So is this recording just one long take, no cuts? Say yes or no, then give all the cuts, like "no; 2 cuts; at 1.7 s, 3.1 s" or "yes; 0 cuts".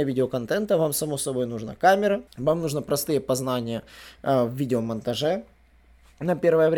no; 1 cut; at 2.3 s